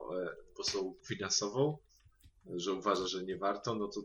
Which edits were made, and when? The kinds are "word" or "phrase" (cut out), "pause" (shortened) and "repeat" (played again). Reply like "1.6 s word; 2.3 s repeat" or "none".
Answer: 1.0 s word; 3.1 s word

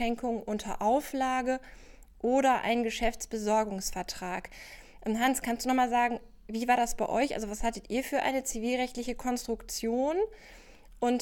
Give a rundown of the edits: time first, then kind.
none

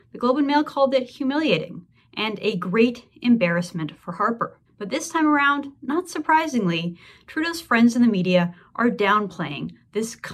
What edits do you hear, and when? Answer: none

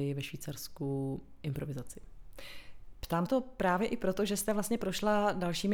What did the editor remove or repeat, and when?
3.3 s phrase

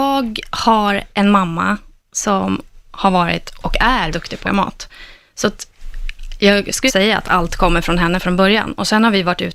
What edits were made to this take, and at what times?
1.1 s pause; 4.1 s word; 4.4 s word; 6.9 s word

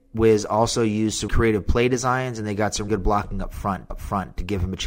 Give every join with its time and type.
1.3 s word; 2.9 s word; 3.9 s repeat

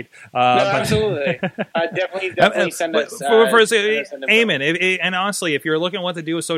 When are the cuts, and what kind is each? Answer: none

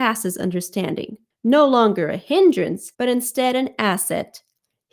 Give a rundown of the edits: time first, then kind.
1.3 s pause; 2.9 s pause

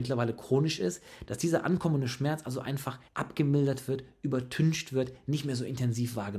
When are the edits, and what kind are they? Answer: 3.1 s pause

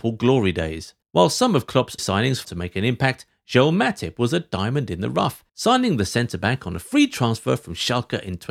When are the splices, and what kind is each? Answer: 1.0 s pause; 2.0 s word; 2.4 s word; 5.5 s pause

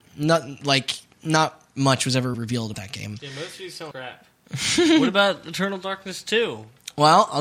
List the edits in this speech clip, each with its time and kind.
2.3 s word; 2.7 s word; 3.9 s word

